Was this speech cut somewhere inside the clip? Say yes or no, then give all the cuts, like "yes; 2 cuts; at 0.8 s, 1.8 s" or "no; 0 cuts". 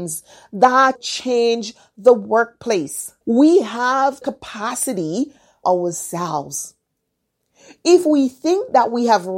yes; 4 cuts; at 0.9 s, 3.2 s, 4.2 s, 5.6 s